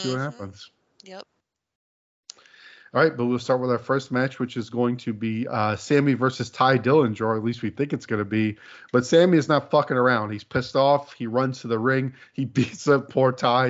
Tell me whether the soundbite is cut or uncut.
uncut